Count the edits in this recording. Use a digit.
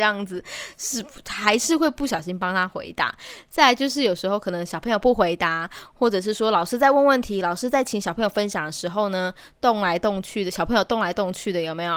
0